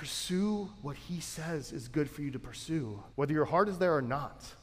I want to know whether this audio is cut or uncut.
cut